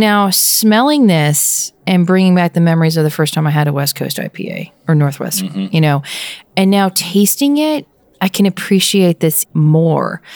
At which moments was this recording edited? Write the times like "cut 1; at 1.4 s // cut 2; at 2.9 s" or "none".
cut 1; at 9.4 s